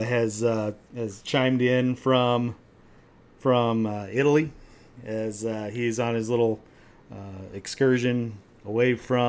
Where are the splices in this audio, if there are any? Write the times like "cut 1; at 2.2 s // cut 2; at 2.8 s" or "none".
none